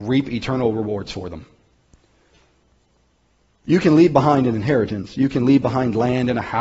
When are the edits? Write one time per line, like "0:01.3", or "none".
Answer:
none